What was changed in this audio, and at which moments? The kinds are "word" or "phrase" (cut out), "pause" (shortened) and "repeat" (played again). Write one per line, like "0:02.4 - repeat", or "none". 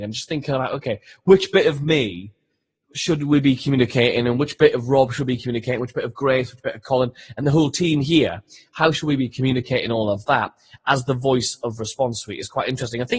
none